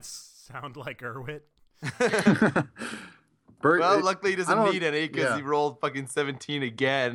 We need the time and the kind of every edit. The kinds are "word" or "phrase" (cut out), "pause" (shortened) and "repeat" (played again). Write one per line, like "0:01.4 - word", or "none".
none